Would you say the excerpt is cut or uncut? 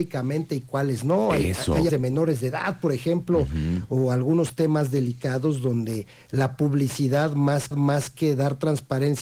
cut